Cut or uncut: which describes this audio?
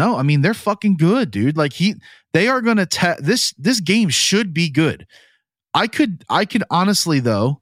uncut